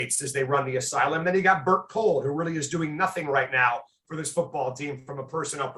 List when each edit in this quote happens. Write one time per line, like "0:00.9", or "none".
none